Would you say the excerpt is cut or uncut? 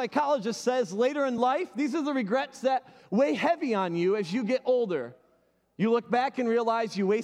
uncut